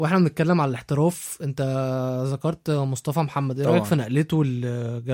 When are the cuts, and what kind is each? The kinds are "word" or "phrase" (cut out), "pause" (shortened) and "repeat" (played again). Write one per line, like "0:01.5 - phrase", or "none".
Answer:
none